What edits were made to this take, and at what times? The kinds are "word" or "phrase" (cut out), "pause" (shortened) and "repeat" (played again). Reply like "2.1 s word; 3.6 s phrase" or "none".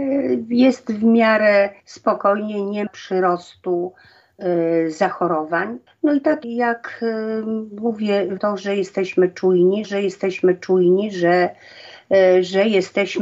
1.8 s pause; 2.9 s word; 5.9 s pause; 6.4 s word; 8.4 s word; 9.8 s repeat